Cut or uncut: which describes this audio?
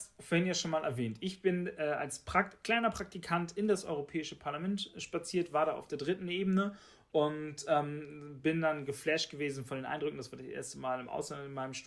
uncut